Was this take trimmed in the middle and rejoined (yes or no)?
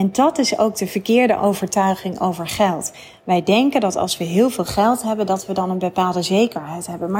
no